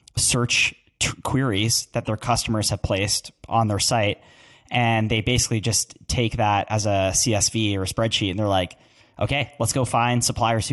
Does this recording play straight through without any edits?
yes; 0 cuts

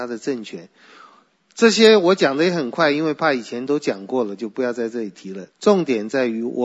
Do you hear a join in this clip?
yes; 1 cut; at 5.5 s

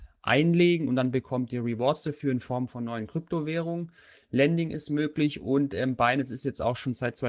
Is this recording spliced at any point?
no; 0 cuts

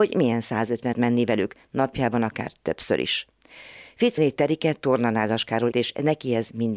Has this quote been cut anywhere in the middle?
yes; 3 cuts; at 0.9 s, 4.2 s, 5.7 s

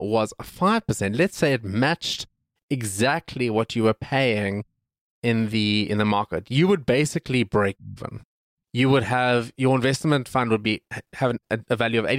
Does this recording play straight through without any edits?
yes; 0 cuts

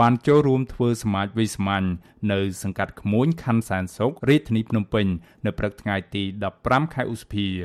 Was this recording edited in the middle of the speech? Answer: yes; 1 cut; at 4.2 s

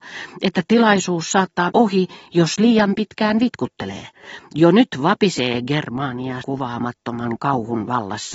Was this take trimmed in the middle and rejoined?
yes; 2 cuts; at 1.7 s, 6.4 s

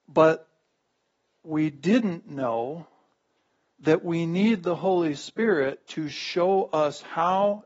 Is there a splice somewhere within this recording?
no; 0 cuts

